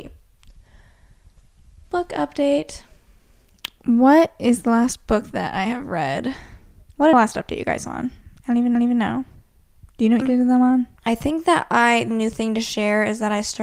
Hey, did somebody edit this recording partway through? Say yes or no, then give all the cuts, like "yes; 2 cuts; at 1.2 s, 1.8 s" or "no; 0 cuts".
yes; 6 cuts; at 6.8 s, 7.1 s, 8.8 s, 10.2 s, 11.0 s, 12.1 s